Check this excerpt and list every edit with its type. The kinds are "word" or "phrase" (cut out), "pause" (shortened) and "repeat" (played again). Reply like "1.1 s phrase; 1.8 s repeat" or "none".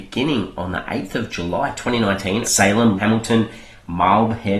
2.4 s word; 3.0 s word

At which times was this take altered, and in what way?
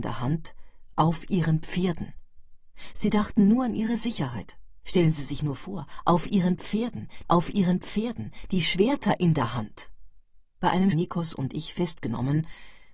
7.2 s repeat; 10.5 s pause; 10.9 s phrase

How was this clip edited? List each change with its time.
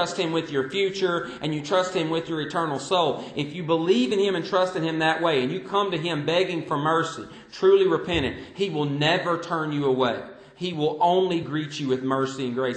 none

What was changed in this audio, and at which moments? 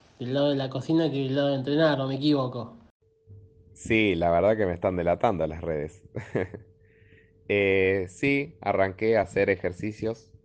none

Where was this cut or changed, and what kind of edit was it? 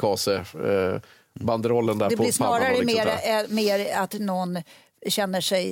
none

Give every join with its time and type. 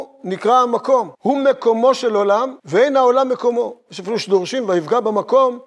1.1 s pause; 2.6 s pause

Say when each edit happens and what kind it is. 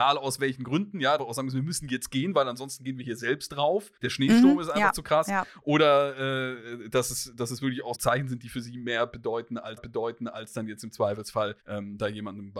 1.2 s phrase; 4.0 s pause; 7.9 s word; 9.8 s repeat; 11.6 s pause

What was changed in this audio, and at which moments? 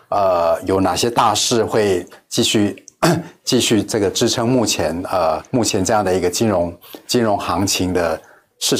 5.5 s pause

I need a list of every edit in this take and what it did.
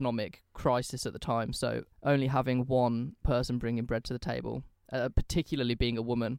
1.9 s pause

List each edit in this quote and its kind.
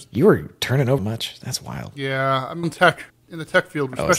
1.0 s word; 2.6 s word; 3.1 s pause

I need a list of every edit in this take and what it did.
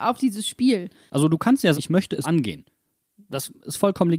1.7 s word; 2.2 s word

